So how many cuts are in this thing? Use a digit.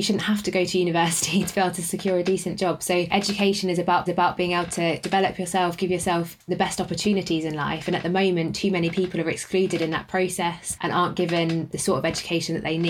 1